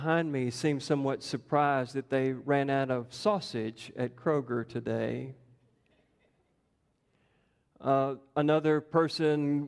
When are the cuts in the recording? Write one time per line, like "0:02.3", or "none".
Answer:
none